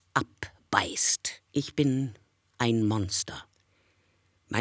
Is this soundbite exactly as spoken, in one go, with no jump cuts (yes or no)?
no